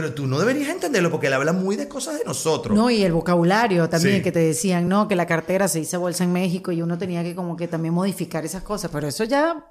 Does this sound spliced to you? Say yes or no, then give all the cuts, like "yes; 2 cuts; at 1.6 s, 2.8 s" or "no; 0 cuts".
no; 0 cuts